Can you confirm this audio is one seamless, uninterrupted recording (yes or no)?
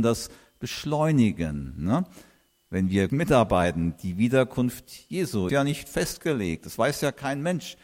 no